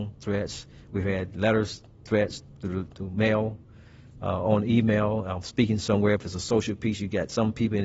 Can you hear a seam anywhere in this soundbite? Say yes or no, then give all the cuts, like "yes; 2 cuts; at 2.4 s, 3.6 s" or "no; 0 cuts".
no; 0 cuts